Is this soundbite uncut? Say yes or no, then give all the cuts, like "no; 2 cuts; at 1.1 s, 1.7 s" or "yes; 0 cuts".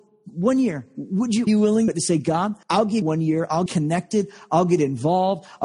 no; 5 cuts; at 1.5 s, 1.9 s, 2.6 s, 3.0 s, 3.7 s